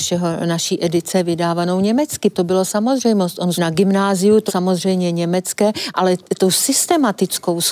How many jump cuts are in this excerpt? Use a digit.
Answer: 3